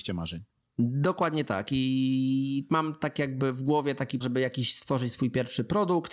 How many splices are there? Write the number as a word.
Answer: one